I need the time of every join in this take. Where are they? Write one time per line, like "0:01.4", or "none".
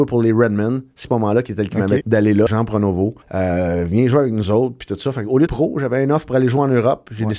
0:01.0
0:01.7
0:02.0
0:02.5
0:03.2
0:05.5